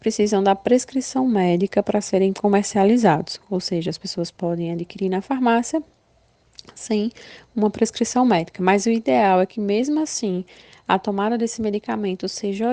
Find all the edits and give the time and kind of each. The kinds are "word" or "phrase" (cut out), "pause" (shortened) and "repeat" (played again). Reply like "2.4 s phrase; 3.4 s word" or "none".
none